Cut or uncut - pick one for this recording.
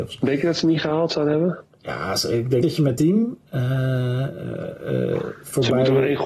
cut